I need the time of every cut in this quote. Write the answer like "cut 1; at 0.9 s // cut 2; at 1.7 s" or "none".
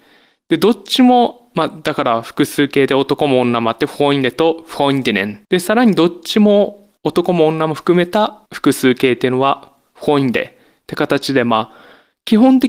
cut 1; at 5.4 s // cut 2; at 7.0 s // cut 3; at 8.5 s